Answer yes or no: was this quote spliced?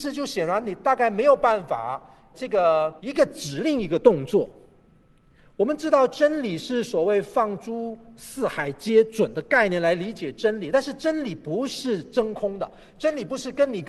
yes